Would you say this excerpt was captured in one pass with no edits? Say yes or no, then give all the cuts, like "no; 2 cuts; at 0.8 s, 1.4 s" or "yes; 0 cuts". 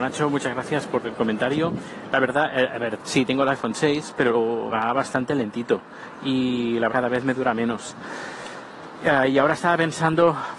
no; 2 cuts; at 4.7 s, 6.9 s